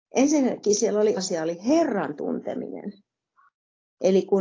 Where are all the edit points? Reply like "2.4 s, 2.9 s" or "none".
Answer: 1.2 s, 2.2 s